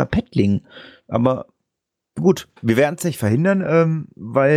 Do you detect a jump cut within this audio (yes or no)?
yes